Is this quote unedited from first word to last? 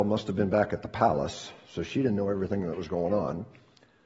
yes; 0 cuts

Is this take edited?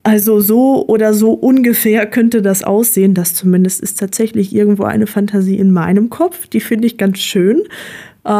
no; 0 cuts

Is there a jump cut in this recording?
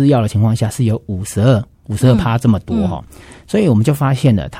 no; 0 cuts

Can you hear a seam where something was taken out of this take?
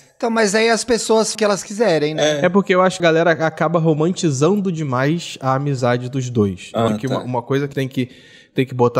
yes; 4 cuts; at 1.3 s, 3.0 s, 6.9 s, 7.7 s

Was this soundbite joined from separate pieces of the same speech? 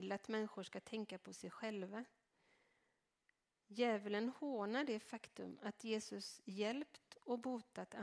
no; 0 cuts

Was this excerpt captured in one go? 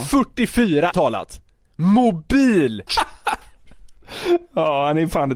no; 2 cuts; at 0.9 s, 2.9 s

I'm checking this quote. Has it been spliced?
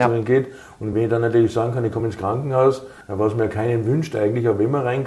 no; 0 cuts

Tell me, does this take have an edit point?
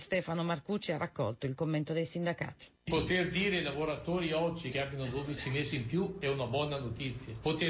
yes; 1 cut; at 2.7 s

